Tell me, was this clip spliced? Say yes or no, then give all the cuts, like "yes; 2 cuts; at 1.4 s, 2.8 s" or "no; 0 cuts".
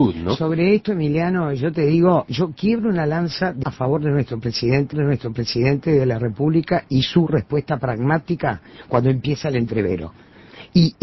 yes; 2 cuts; at 3.6 s, 4.9 s